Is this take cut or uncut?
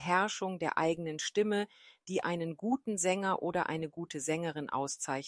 uncut